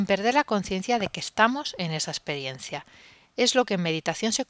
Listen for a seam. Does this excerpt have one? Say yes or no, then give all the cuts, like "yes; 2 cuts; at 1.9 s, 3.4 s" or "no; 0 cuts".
no; 0 cuts